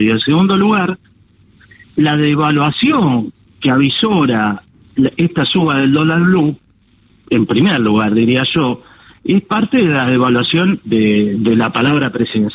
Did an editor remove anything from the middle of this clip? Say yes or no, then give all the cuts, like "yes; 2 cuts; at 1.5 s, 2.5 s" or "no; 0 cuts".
yes; 2 cuts; at 3.4 s, 10.8 s